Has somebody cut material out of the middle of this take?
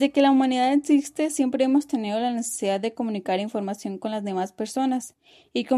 no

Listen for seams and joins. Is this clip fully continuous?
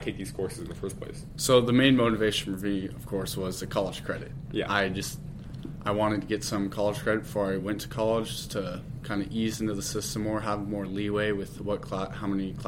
yes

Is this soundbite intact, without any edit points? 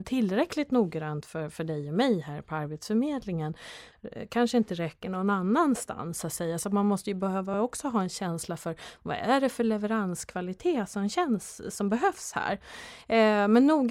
yes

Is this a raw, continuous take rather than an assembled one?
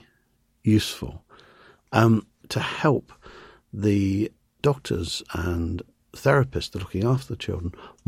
yes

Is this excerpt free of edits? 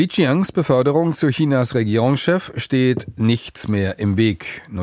yes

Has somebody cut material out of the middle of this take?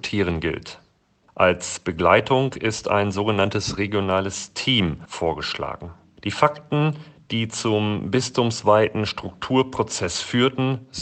no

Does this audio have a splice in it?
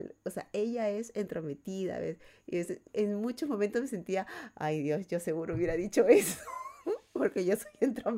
yes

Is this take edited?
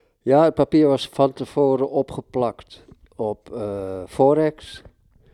no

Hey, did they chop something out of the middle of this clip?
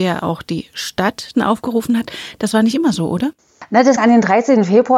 yes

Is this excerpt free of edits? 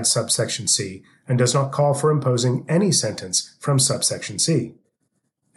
yes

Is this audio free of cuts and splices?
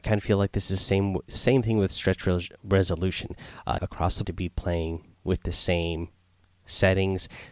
no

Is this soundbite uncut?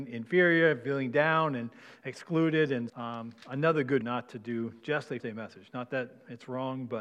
no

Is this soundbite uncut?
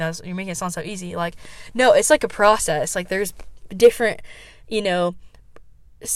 yes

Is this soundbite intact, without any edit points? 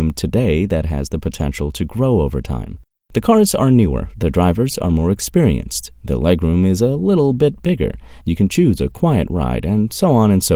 yes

